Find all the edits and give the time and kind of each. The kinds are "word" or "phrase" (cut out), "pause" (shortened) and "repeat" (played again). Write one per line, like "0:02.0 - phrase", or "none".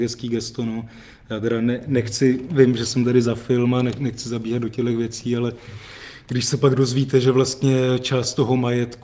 none